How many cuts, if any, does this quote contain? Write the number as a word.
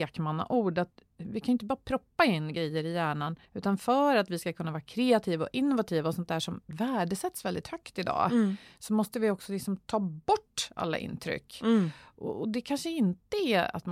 one